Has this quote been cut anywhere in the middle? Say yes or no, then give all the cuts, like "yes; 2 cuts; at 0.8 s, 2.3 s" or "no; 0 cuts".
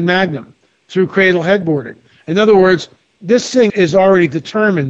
yes; 1 cut; at 3.7 s